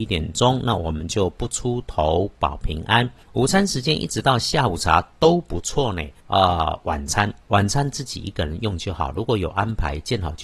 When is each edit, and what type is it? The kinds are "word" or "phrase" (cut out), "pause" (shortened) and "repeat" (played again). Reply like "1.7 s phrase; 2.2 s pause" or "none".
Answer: 3.2 s pause; 6.2 s pause; 7.4 s pause